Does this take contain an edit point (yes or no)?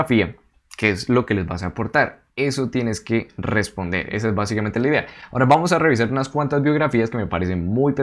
yes